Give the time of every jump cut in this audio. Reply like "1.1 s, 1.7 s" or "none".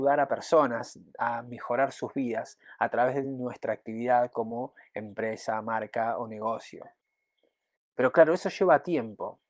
none